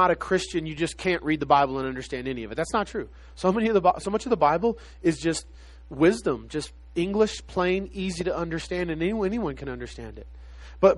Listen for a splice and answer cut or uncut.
uncut